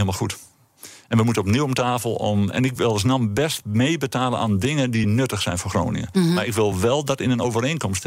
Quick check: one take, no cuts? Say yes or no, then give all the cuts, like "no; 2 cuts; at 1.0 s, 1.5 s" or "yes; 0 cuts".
yes; 0 cuts